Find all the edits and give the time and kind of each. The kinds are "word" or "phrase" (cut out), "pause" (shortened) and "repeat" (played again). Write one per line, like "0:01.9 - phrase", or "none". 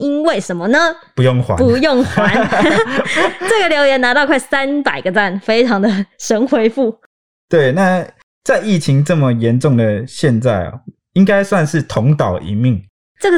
none